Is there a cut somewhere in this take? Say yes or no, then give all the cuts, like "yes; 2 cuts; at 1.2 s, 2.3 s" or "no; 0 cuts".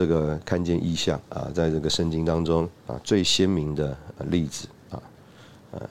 yes; 1 cut; at 2.8 s